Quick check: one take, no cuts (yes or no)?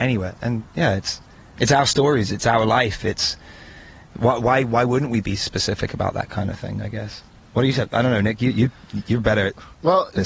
yes